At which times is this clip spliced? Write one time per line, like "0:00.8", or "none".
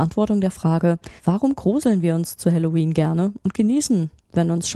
0:01.2